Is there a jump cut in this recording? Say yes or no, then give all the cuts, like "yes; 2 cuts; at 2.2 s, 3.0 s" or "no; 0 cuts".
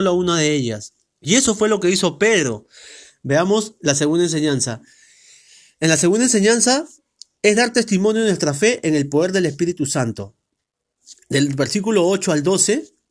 no; 0 cuts